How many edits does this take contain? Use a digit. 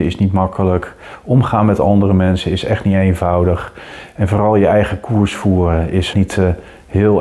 1